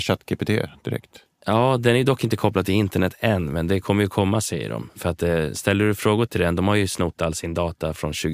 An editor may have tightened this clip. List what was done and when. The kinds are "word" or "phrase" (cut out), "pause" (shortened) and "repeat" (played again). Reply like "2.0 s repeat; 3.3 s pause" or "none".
none